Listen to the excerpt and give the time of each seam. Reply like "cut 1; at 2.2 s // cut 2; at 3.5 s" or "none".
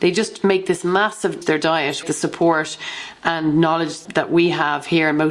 cut 1; at 1.4 s // cut 2; at 2.0 s // cut 3; at 4.0 s